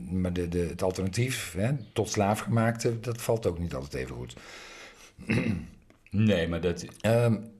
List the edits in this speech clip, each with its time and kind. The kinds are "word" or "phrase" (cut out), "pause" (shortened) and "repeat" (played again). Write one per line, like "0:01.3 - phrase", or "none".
none